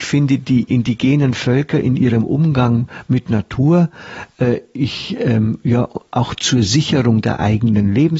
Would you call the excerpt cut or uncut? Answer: uncut